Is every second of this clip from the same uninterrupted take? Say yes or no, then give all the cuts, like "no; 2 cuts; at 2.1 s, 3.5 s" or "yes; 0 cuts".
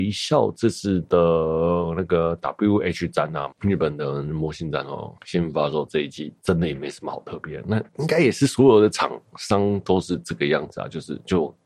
no; 3 cuts; at 3.5 s, 5.2 s, 7.9 s